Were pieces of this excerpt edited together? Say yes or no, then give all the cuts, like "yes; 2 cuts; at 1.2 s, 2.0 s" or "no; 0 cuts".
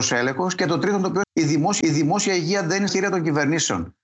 yes; 3 cuts; at 1.2 s, 1.8 s, 2.9 s